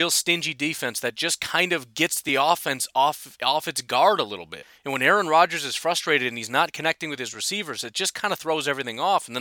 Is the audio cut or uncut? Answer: uncut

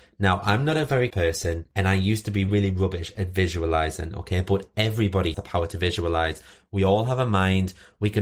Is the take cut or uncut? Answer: cut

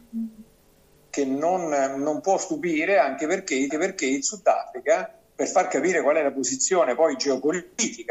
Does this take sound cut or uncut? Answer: cut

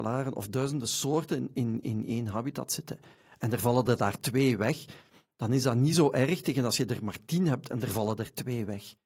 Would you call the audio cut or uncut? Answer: uncut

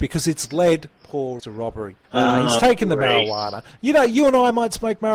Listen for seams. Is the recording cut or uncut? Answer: cut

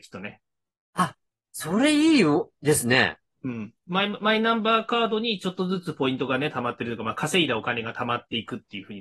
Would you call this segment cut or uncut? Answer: cut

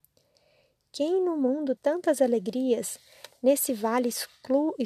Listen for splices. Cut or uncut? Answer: cut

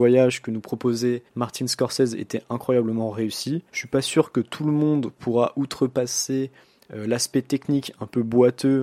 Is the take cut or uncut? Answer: cut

